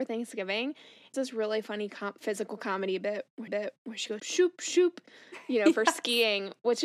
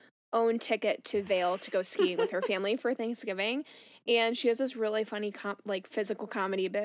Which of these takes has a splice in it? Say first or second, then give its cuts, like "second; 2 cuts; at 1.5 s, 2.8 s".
first; 4 cuts; at 1.1 s, 2.2 s, 3.5 s, 4.2 s